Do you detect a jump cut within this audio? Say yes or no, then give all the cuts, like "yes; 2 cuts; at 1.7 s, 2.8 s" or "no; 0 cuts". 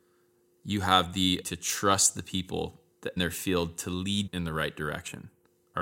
yes; 3 cuts; at 1.4 s, 3.2 s, 4.3 s